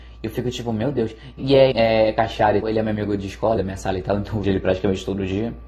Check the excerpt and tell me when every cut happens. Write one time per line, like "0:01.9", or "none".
0:01.4
0:01.7
0:02.6
0:03.6
0:04.4